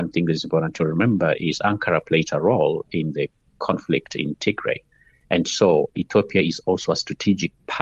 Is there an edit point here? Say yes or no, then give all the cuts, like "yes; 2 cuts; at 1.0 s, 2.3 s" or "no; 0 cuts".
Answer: no; 0 cuts